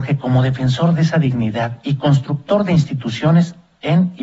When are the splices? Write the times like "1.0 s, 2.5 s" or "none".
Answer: none

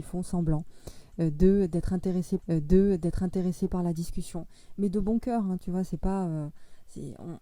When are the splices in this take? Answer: 2.4 s

